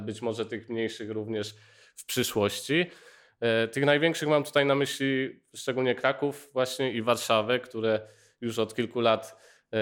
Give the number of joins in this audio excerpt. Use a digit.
0